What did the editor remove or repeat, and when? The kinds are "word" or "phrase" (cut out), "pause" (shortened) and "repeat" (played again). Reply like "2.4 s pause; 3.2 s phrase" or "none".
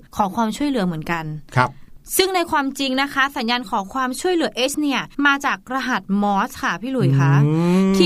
4.7 s word; 5.1 s pause